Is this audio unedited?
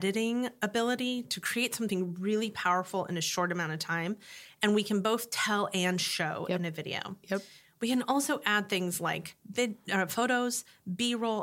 yes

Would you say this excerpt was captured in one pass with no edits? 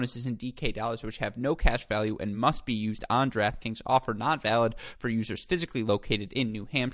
yes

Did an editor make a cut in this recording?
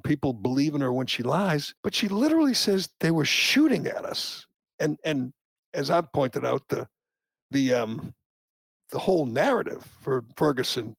yes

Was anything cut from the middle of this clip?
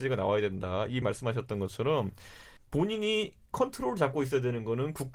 yes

